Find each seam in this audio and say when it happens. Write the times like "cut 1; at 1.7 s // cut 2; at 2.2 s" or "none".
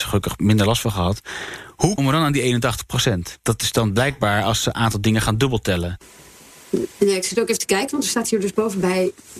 cut 1; at 2.0 s // cut 2; at 6.5 s